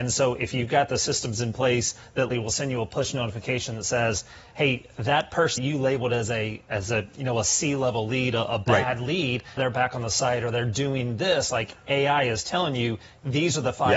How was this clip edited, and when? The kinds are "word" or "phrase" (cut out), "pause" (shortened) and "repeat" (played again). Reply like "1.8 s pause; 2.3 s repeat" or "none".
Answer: 2.3 s word; 5.6 s word; 9.6 s word